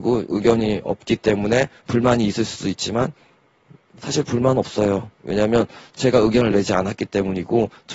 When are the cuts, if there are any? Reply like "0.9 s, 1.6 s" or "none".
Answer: none